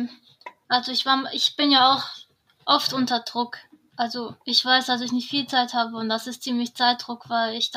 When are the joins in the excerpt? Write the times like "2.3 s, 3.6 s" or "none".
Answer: 2.5 s, 4.4 s